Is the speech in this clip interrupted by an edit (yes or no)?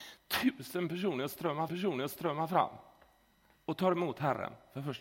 yes